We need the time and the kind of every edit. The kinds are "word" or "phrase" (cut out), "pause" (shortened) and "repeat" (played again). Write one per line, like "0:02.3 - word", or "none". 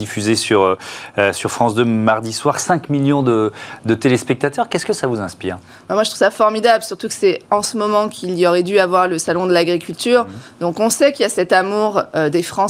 none

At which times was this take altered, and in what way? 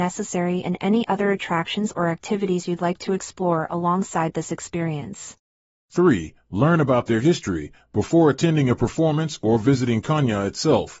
none

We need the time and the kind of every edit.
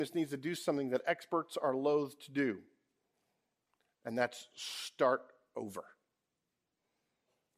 none

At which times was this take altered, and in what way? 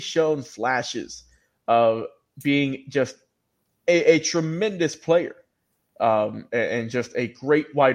none

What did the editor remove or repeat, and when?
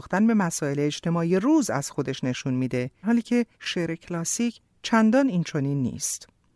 0:03.0 - word
0:03.5 - pause

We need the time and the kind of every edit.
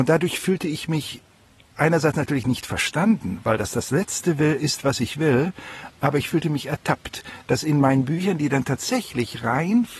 none

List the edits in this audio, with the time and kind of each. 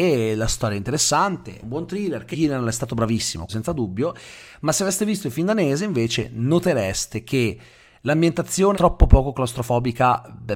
0:01.6 - word
0:02.3 - word
0:03.5 - word
0:08.7 - word

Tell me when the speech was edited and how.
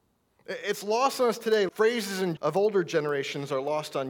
0:01.7 - word
0:02.4 - word

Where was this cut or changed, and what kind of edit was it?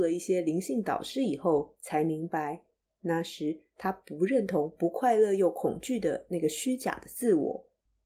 none

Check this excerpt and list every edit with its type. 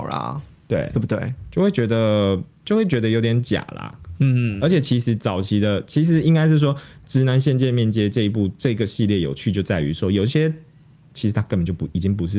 none

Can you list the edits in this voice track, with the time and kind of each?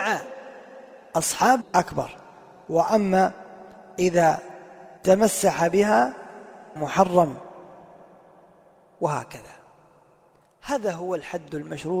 0:01.6 - phrase
0:05.0 - pause
0:06.8 - phrase

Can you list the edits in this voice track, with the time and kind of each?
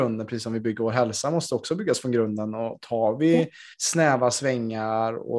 0:03.7 - pause

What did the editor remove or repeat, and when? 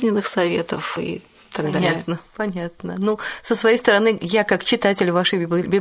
0:01.0 - word

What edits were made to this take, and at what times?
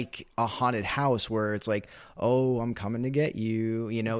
none

